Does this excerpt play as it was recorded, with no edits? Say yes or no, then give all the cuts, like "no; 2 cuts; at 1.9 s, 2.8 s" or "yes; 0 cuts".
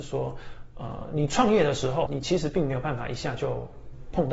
no; 1 cut; at 2.1 s